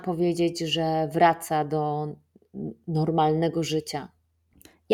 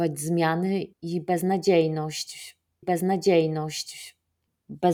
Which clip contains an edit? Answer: second; 2 cuts; at 0.9 s, 2.8 s

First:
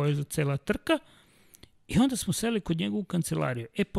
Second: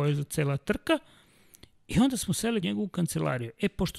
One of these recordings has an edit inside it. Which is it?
second; 1 cut; at 2.6 s

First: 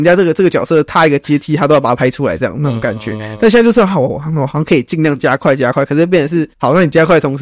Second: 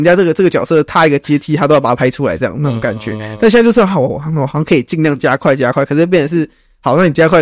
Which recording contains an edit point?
first; 1 cut; at 6.5 s

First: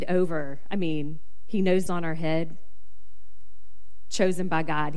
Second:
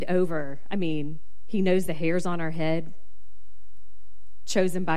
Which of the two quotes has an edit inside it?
first; 1 cut; at 1.9 s

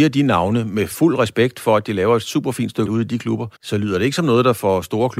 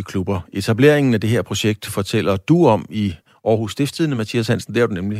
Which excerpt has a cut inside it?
first; 2 cuts; at 2.9 s, 3.5 s

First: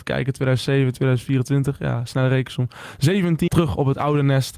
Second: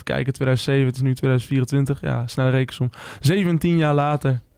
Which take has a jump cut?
first; 2 cuts; at 0.9 s, 3.5 s

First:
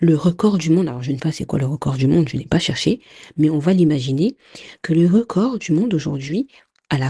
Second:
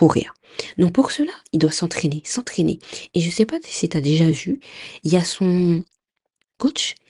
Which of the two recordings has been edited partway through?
first; 1 cut; at 1.2 s

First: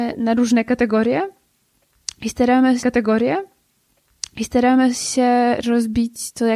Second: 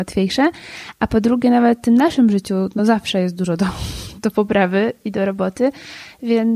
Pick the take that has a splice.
first; 1 cut; at 2.8 s

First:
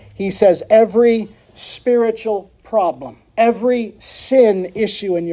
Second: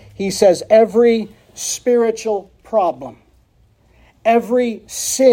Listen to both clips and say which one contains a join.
first; 1 cut; at 3.3 s

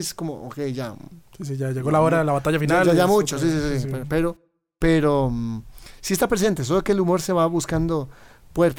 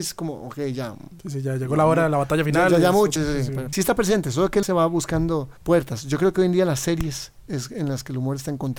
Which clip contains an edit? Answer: second; 5 cuts; at 1.2 s, 3.2 s, 3.7 s, 4.6 s, 5.6 s

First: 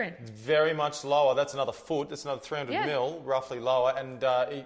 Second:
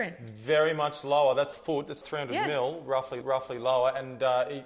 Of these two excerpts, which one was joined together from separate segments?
second; 3 cuts; at 1.5 s, 2.0 s, 3.2 s

